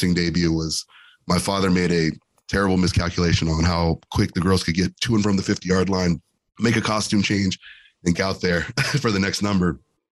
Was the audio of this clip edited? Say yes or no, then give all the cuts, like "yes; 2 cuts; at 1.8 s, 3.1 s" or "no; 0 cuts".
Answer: yes; 1 cut; at 8.1 s